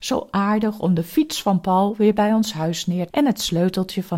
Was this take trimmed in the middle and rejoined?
yes; 1 cut; at 3.1 s

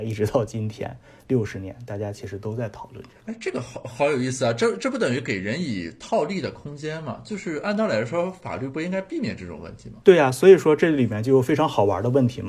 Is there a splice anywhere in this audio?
yes; 1 cut; at 10.0 s

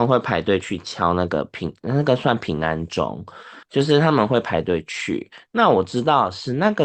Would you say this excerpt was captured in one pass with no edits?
no; 1 cut; at 3.6 s

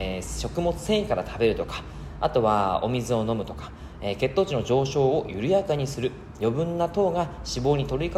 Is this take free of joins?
yes; 0 cuts

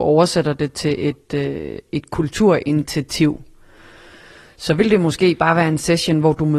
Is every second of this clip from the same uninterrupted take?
yes; 0 cuts

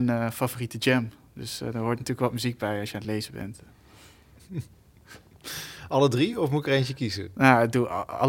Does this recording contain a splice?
no; 0 cuts

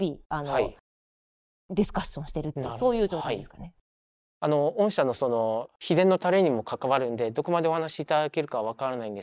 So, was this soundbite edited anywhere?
no; 0 cuts

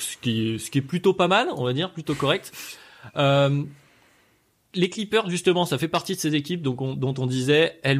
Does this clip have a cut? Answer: no; 0 cuts

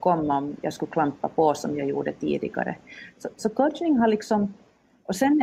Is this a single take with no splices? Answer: yes; 0 cuts

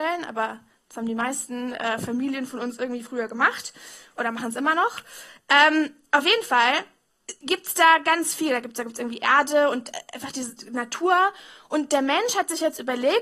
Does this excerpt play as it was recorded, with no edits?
yes; 0 cuts

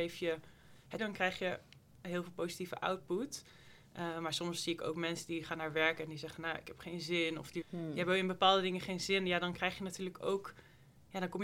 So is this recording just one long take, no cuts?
no; 2 cuts; at 1.0 s, 7.6 s

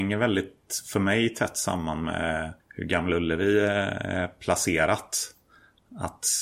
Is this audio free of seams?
no; 1 cut; at 2.6 s

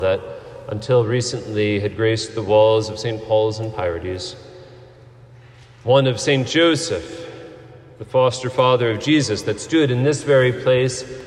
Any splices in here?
no; 0 cuts

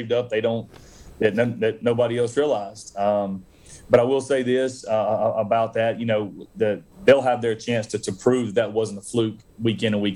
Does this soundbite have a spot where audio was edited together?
yes; 1 cut; at 6.9 s

